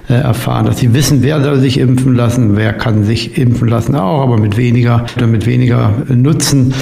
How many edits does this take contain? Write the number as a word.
one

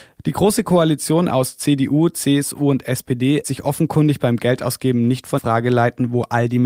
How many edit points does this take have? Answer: two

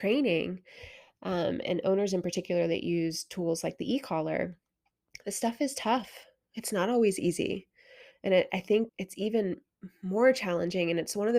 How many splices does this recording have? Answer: one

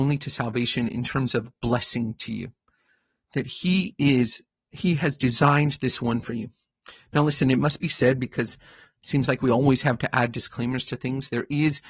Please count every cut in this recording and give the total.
zero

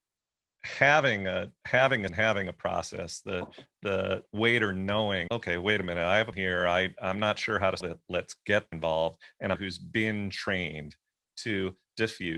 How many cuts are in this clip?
six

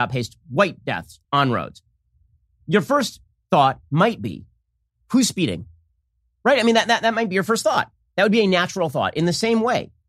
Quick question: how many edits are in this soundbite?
one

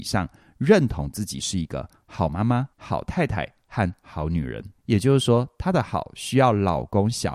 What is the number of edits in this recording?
two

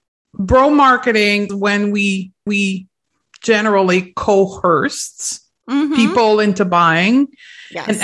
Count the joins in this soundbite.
two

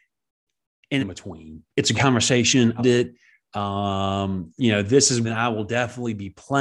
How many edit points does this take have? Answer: five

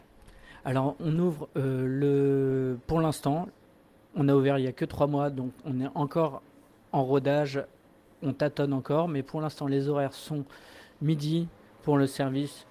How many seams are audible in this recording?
zero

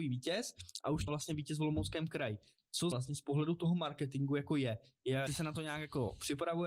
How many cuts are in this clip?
three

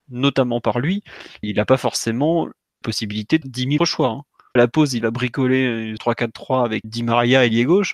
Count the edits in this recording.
eight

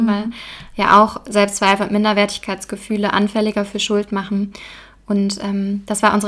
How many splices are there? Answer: zero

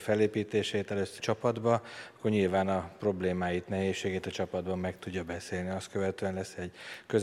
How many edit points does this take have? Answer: one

